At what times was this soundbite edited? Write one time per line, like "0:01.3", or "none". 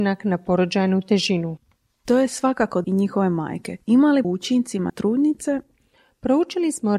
0:01.7
0:02.8
0:04.2
0:04.9